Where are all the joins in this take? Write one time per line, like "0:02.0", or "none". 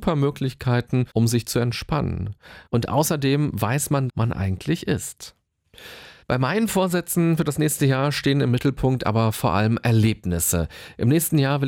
0:01.1
0:04.1
0:06.2